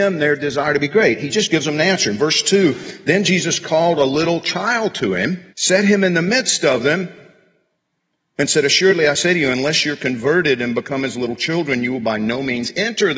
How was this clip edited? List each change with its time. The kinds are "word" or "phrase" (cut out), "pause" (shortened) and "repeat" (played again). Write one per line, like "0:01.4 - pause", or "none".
0:05.5 - pause